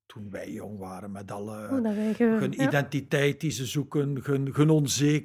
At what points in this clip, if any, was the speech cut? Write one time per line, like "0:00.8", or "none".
none

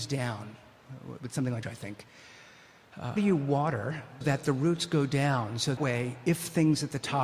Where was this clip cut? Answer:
0:01.6
0:03.2
0:04.2
0:05.8

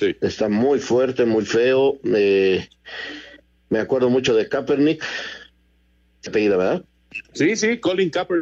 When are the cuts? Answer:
0:06.3
0:07.2

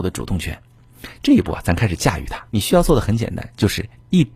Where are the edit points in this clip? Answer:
0:02.5

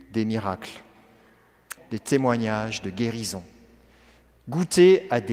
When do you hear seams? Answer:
0:01.8

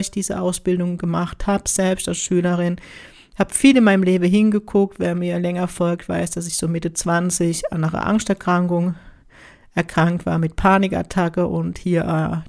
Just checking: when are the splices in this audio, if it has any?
none

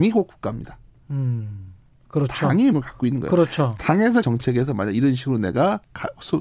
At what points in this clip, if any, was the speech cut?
0:02.7
0:04.2

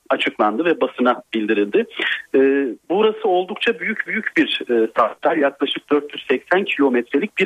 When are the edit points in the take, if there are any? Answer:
0:02.8
0:04.1

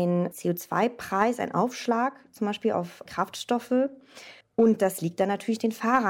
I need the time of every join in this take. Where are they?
0:04.4

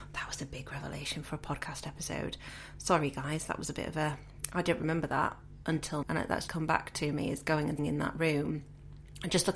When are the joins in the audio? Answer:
0:06.0
0:06.5
0:07.8

